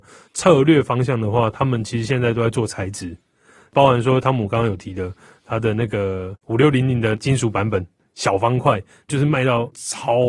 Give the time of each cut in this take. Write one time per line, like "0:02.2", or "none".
none